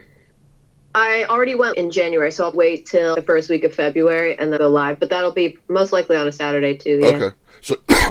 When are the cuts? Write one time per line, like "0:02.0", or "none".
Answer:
0:01.7
0:02.5
0:03.1
0:04.6